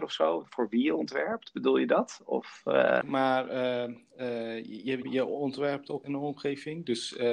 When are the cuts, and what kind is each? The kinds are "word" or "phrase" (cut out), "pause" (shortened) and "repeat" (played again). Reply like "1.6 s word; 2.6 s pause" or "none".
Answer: 3.0 s word; 5.0 s word; 6.0 s word

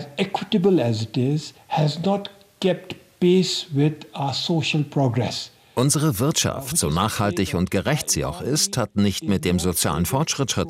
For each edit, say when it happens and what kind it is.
none

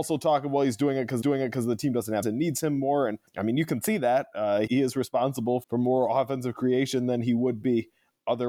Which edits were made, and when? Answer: 1.2 s repeat; 2.2 s word; 3.3 s pause; 4.7 s word; 5.6 s word

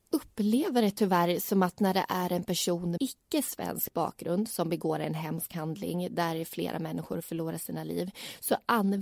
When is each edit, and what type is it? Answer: 3.0 s word

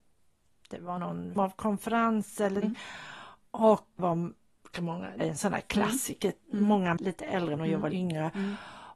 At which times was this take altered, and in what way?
1.0 s word; 1.4 s word; 2.6 s word; 4.0 s word; 4.7 s word; 5.2 s word; 7.0 s word; 7.6 s word; 7.9 s word

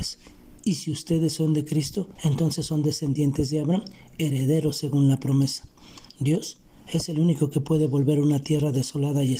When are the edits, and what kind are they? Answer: 2.2 s pause; 6.1 s pause

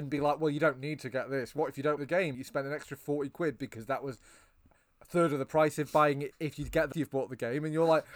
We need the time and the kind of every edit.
2.0 s word; 2.3 s word; 6.3 s word; 6.9 s word

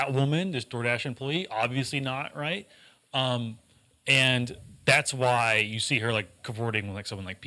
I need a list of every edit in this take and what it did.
none

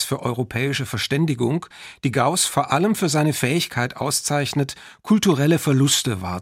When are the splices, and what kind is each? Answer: none

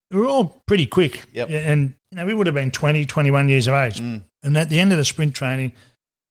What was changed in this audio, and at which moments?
2.0 s pause; 4.3 s pause

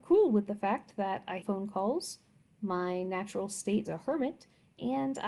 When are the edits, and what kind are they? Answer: 1.4 s word; 3.8 s word

